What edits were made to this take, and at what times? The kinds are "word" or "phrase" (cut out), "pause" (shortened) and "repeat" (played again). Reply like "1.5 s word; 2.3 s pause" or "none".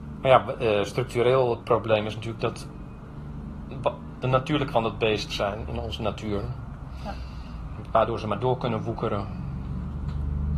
1.6 s word; 4.2 s word; 4.7 s word; 5.3 s word